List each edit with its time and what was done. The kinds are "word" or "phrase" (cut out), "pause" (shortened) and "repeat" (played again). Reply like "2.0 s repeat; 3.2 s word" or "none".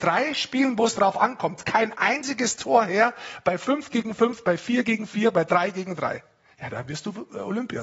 none